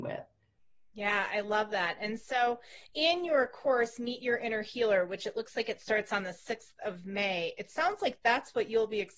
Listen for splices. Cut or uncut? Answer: uncut